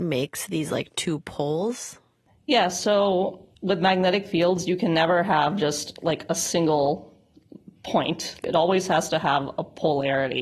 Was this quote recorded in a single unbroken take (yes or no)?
no